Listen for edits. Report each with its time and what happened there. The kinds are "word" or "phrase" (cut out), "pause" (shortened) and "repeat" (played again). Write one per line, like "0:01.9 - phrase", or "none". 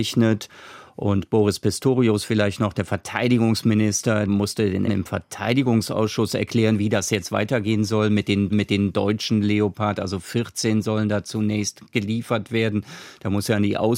0:04.3 - word
0:04.9 - word
0:08.5 - repeat